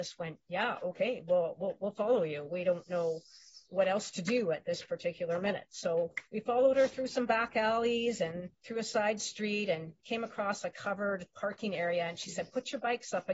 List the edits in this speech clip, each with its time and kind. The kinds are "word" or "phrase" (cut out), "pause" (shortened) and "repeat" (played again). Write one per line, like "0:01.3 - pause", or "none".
0:03.6 - pause
0:08.5 - pause
0:10.0 - pause